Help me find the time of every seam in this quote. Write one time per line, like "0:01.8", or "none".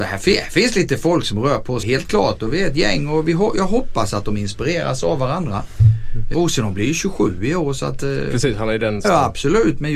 0:01.8
0:06.3
0:09.0

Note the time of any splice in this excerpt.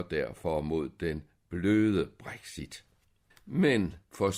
0:03.3

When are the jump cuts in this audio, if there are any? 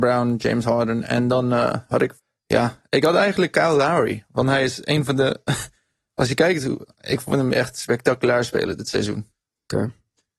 0:02.2

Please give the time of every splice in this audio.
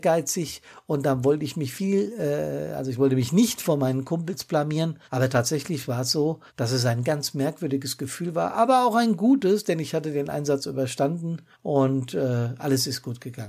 0:05.0
0:06.5
0:11.5

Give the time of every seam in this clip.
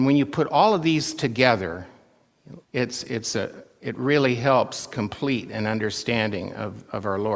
0:02.6

